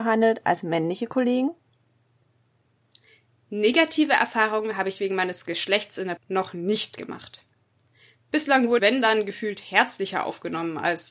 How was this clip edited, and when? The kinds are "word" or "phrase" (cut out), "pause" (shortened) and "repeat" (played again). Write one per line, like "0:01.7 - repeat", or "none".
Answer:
0:06.2 - word
0:08.8 - word